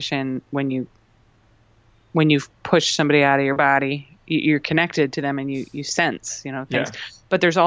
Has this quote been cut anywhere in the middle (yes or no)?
no